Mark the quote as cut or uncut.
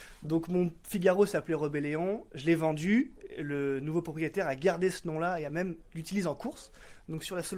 uncut